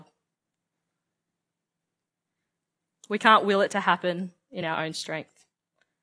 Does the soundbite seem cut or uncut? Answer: uncut